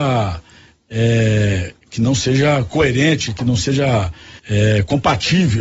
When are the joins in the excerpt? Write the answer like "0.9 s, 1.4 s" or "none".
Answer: 4.4 s